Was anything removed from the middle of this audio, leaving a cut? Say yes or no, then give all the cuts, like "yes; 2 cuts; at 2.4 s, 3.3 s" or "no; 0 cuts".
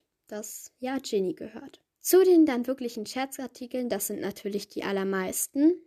yes; 1 cut; at 1.9 s